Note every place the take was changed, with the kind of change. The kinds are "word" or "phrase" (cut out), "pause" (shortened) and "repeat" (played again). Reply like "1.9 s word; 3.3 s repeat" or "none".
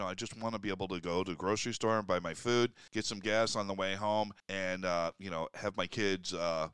2.9 s pause; 4.4 s pause